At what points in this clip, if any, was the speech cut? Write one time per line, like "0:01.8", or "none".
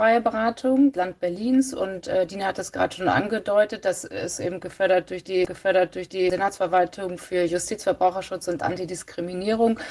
0:00.9
0:05.5